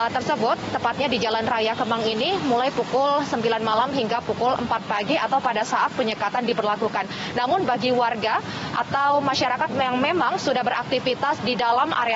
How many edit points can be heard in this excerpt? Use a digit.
0